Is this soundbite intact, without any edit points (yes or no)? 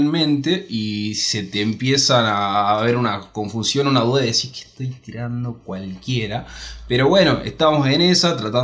yes